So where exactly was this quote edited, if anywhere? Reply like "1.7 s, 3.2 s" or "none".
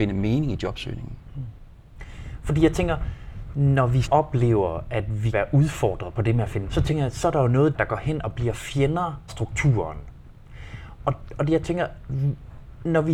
4.0 s, 5.3 s, 6.6 s, 7.7 s, 9.3 s